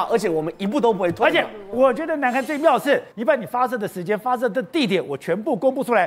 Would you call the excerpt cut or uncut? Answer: cut